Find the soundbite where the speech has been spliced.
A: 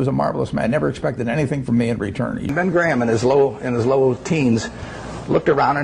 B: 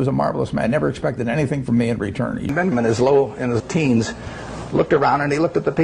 B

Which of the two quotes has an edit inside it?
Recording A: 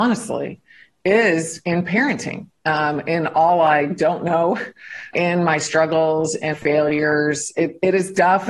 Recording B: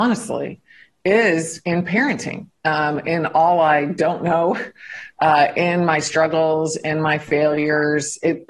A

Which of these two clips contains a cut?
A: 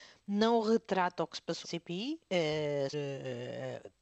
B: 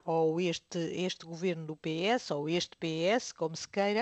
A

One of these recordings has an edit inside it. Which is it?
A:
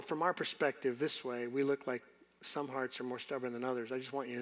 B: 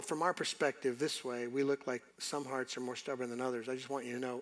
B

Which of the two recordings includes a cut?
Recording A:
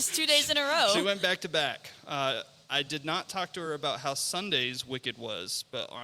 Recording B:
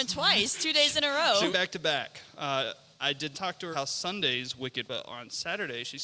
B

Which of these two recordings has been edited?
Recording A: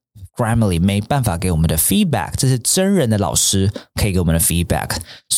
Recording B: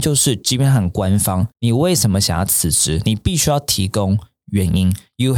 B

